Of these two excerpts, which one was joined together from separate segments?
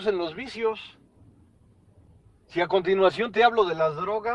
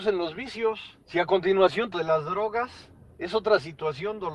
second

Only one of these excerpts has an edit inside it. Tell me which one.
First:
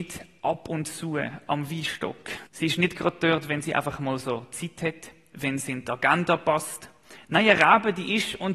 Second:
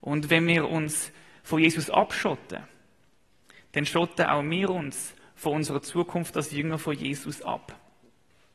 first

